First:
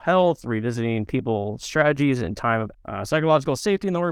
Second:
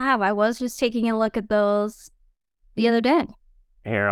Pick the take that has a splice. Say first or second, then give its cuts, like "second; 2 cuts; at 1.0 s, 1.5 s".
first; 1 cut; at 2.7 s